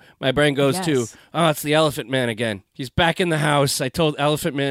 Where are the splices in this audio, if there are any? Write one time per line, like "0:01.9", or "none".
0:02.7